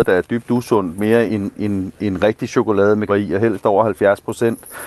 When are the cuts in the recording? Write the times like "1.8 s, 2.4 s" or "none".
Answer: 1.3 s, 3.1 s